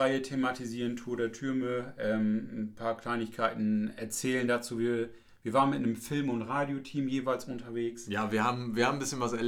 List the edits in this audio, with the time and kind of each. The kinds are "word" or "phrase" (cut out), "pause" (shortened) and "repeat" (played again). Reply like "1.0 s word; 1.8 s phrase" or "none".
none